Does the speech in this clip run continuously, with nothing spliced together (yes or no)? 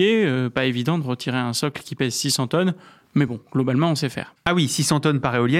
yes